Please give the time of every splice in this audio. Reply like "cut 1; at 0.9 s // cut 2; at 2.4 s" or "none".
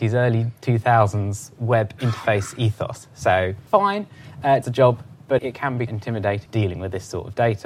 cut 1; at 3.7 s // cut 2; at 4.6 s // cut 3; at 5.4 s // cut 4; at 5.9 s // cut 5; at 6.5 s